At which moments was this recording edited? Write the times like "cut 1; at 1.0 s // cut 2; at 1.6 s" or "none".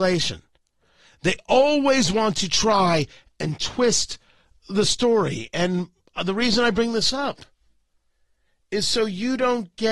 none